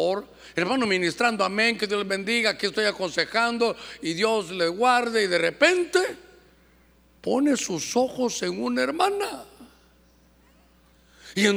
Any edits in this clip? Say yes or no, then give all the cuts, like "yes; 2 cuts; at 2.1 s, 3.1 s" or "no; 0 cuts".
no; 0 cuts